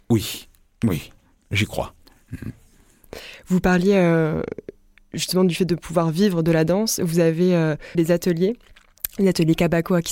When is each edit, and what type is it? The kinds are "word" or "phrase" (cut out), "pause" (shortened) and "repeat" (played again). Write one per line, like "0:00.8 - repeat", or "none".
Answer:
0:07.9 - word